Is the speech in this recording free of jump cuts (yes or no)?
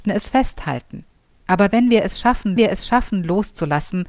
no